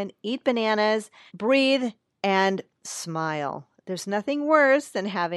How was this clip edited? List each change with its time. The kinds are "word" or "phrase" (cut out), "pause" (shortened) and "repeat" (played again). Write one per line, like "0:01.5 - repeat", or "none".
0:01.3 - word